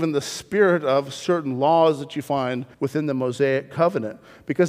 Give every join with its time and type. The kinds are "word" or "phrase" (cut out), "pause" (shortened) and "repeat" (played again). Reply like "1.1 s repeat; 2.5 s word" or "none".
2.7 s pause

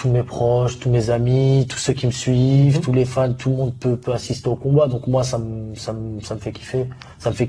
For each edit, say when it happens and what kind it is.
none

